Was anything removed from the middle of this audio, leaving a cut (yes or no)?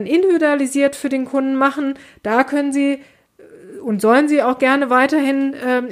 no